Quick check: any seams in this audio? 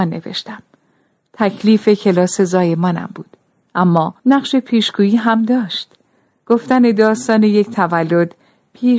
yes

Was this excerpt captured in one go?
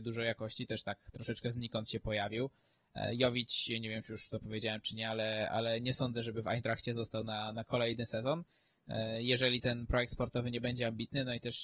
yes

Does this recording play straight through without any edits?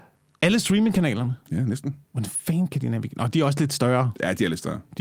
no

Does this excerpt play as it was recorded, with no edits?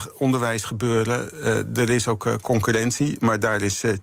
yes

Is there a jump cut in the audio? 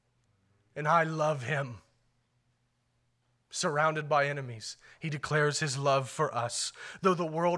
no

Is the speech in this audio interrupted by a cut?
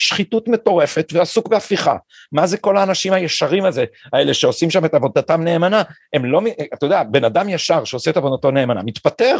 no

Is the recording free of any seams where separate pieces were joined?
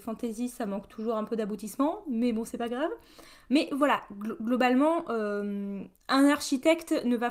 yes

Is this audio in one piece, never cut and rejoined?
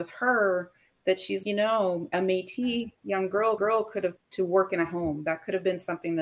no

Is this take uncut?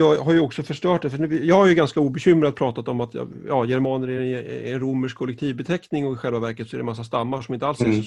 yes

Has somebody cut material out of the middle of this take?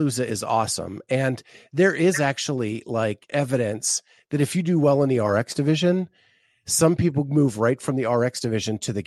no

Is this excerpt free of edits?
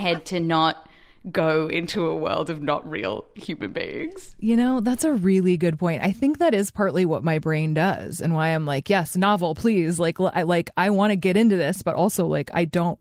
yes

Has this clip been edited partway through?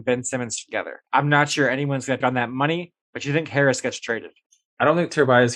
yes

